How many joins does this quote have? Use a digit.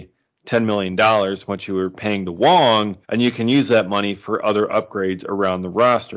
1